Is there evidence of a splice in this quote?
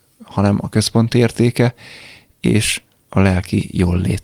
no; 0 cuts

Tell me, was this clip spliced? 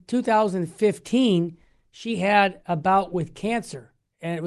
no; 0 cuts

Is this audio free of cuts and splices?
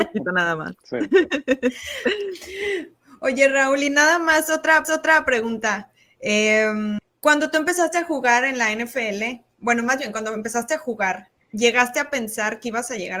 no; 1 cut; at 4.8 s

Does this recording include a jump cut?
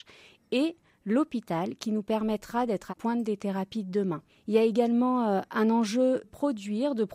yes; 3 cuts; at 2.9 s, 4.3 s, 6.2 s

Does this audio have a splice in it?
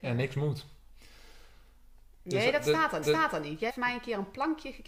yes; 2 cuts; at 3.0 s, 3.7 s

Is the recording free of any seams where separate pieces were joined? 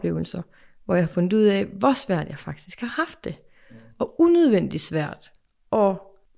yes; 0 cuts

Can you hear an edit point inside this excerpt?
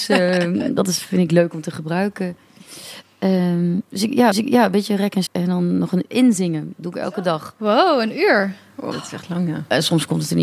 yes; 4 cuts; at 4.3 s, 5.3 s, 6.1 s, 8.9 s

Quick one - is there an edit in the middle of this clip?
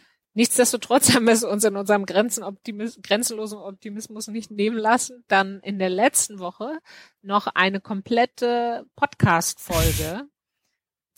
no; 0 cuts

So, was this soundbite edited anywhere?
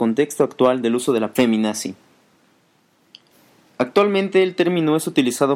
yes; 1 cut; at 1.3 s

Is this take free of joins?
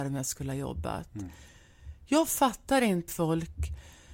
no; 1 cut; at 3.1 s

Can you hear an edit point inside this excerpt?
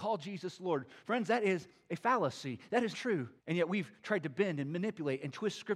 yes; 2 cuts; at 2.9 s, 3.4 s

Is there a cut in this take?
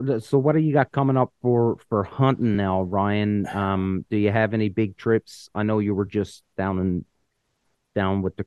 no; 0 cuts

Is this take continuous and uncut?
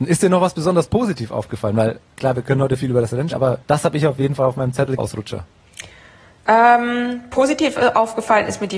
no; 3 cuts; at 3.3 s, 3.6 s, 5.0 s

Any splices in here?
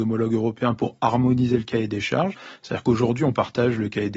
no; 0 cuts

